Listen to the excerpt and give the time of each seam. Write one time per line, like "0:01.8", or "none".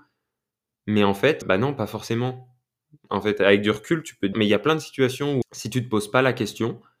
0:01.4
0:04.3
0:05.4